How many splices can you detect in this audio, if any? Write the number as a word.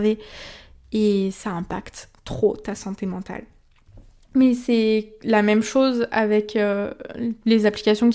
zero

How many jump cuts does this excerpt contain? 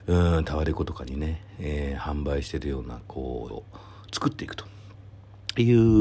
one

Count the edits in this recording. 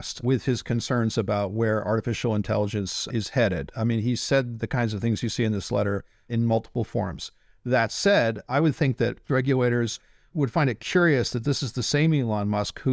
one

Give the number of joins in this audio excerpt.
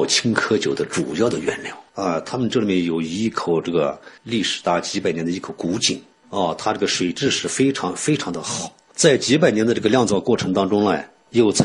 two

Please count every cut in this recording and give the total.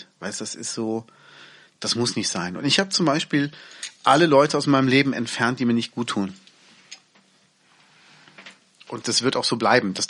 one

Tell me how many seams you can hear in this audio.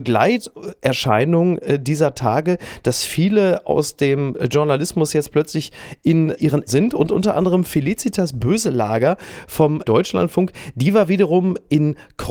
one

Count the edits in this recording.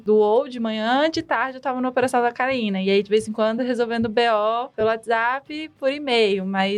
zero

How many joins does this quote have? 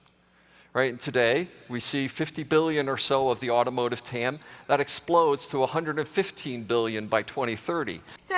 zero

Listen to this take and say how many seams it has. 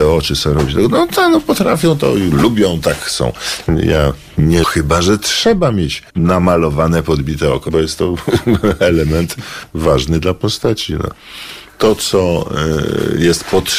three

